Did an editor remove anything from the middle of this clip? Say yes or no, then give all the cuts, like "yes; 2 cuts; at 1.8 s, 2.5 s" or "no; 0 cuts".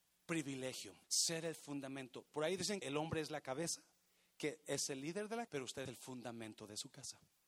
yes; 4 cuts; at 1.0 s, 2.8 s, 5.5 s, 5.9 s